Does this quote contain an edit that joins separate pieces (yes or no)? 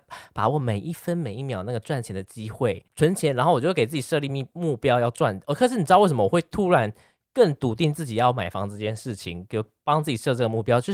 yes